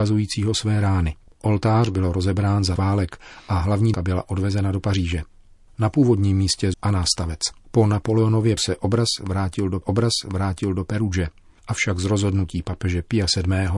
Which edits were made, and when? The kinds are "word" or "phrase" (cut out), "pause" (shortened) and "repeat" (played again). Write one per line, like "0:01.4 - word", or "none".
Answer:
0:01.2 - pause
0:02.8 - word
0:03.9 - word
0:06.7 - phrase
0:07.6 - pause
0:08.6 - word
0:09.8 - repeat